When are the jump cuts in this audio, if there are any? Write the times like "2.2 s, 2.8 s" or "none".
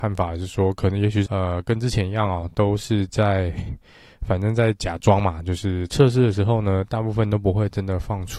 1.3 s